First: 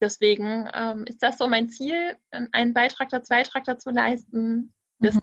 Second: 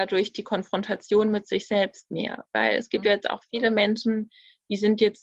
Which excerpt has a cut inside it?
first; 1 cut; at 3.3 s

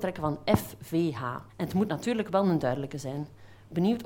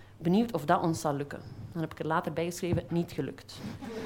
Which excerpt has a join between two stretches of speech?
first; 1 cut; at 1.5 s

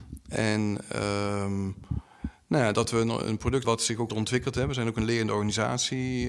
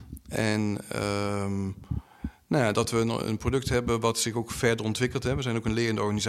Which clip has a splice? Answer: first; 2 cuts; at 3.6 s, 4.1 s

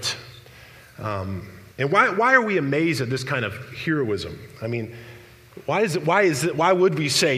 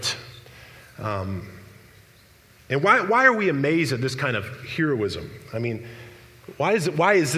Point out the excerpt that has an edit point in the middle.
first; 1 cut; at 1.7 s

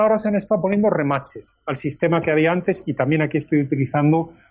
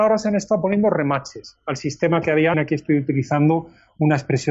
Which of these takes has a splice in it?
second; 1 cut; at 2.5 s

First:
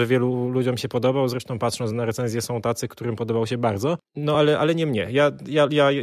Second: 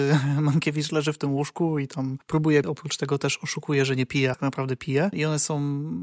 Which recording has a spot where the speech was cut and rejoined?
second; 2 cuts; at 2.6 s, 4.3 s

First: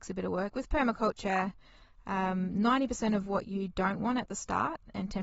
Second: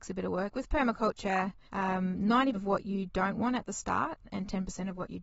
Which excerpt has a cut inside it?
second; 2 cuts; at 1.7 s, 2.5 s

